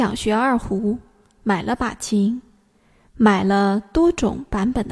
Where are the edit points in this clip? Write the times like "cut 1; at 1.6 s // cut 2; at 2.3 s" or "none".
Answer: none